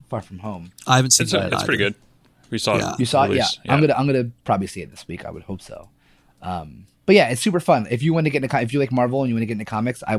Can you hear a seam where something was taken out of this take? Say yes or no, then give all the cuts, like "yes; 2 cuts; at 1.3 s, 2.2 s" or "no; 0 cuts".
no; 0 cuts